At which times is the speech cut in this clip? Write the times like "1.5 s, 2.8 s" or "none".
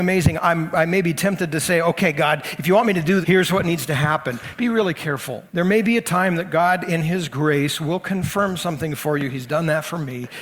3.2 s, 5.5 s